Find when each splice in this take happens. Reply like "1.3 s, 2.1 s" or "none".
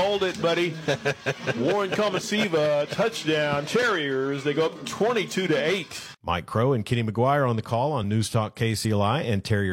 none